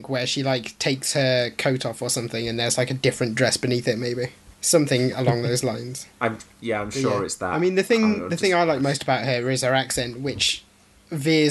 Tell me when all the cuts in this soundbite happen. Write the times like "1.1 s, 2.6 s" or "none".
4.5 s, 6.1 s